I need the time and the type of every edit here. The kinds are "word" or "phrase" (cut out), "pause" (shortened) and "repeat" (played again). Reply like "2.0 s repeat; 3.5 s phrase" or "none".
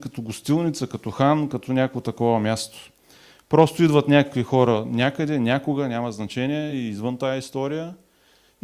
none